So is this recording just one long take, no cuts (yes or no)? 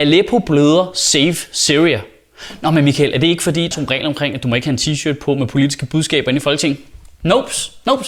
no